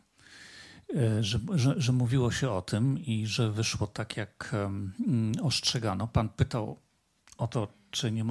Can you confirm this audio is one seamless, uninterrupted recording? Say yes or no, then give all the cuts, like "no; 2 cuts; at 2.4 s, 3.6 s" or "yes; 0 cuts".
yes; 0 cuts